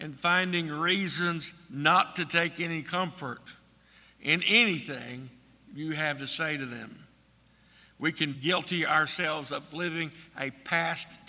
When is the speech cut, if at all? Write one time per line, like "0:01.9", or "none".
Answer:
0:08.3